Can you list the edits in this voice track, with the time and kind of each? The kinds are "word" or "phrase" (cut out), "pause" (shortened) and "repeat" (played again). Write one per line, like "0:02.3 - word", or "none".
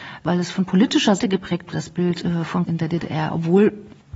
0:01.2 - word
0:01.7 - word
0:02.7 - word